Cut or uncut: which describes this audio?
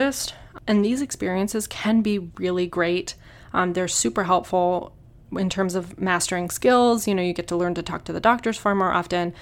uncut